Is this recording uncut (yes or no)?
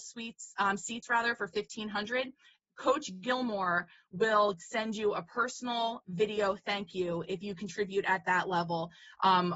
yes